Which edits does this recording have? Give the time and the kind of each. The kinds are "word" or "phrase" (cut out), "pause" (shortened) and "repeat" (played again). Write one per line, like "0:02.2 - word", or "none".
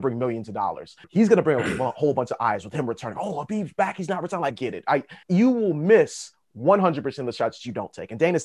0:01.0 - pause
0:04.5 - word
0:05.2 - pause